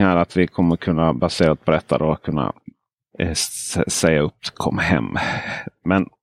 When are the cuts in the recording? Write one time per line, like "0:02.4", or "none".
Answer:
none